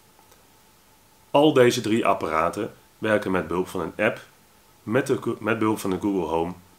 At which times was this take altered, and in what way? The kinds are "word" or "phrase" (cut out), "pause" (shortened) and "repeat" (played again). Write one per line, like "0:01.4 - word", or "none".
none

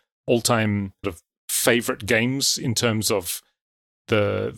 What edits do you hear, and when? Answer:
0:01.0 - word

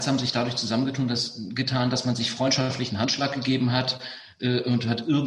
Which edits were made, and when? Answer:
none

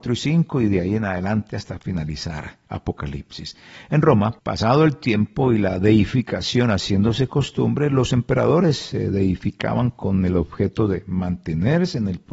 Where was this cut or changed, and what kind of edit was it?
0:02.6 - pause
0:04.4 - pause

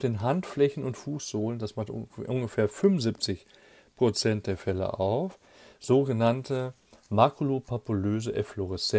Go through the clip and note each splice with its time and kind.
none

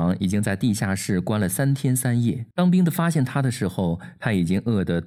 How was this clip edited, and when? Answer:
0:02.5 - pause

